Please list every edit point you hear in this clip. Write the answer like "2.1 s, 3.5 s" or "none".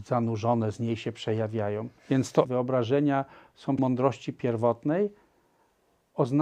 2.0 s, 2.4 s, 3.8 s